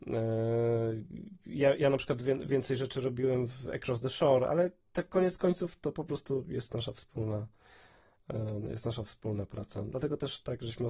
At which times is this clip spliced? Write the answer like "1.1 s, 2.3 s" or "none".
4.8 s